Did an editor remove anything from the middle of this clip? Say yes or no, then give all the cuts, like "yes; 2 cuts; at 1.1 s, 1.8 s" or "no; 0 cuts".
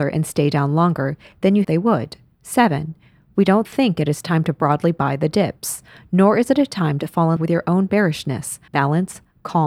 yes; 3 cuts; at 1.6 s, 7.4 s, 8.7 s